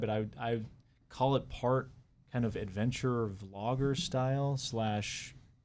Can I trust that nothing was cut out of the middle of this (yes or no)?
yes